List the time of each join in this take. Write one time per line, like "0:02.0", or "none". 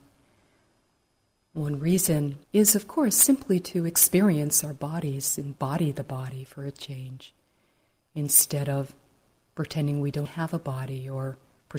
0:02.4
0:10.3